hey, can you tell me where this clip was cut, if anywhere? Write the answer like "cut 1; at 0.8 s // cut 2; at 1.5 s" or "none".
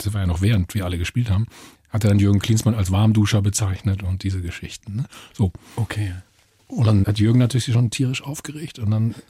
none